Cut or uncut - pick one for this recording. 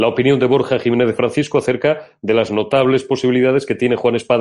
uncut